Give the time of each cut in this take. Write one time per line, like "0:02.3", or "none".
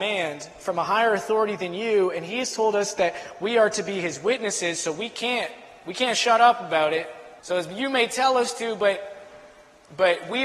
0:07.4